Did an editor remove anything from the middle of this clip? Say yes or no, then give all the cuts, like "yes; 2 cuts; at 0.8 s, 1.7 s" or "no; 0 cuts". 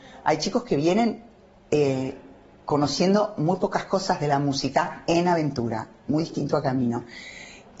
no; 0 cuts